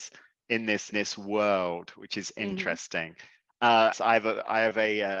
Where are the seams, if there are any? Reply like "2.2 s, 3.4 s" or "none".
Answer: 0.9 s, 3.9 s